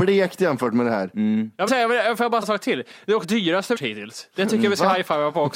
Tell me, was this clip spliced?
yes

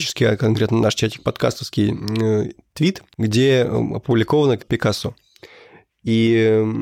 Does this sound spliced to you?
yes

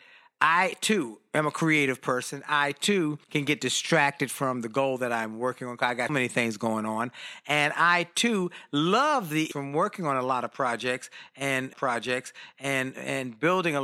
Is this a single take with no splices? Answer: no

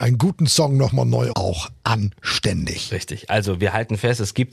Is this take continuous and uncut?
no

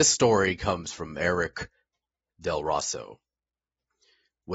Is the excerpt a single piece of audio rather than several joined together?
yes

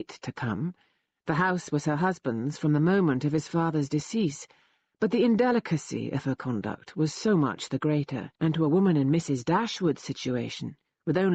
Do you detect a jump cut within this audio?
yes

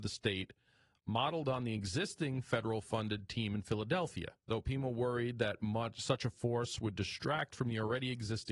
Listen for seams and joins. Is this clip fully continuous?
no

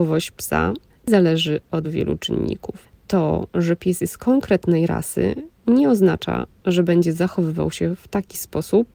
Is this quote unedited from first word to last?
no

